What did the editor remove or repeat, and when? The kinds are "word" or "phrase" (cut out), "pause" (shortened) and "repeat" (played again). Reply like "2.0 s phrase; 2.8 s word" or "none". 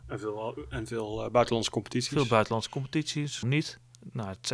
3.4 s word